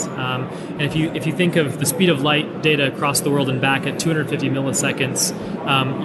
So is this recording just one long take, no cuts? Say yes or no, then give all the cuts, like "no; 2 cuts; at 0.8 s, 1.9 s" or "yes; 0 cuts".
yes; 0 cuts